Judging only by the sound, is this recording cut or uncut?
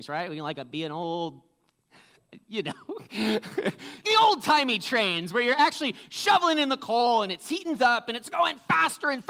cut